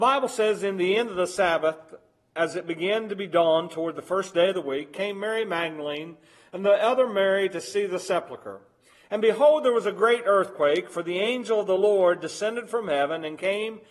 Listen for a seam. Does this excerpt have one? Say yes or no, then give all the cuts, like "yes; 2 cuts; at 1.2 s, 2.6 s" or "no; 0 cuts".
no; 0 cuts